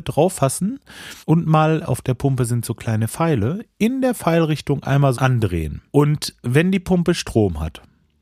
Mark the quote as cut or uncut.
cut